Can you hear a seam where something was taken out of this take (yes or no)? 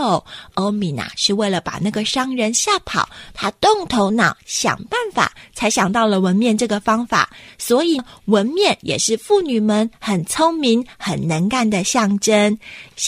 no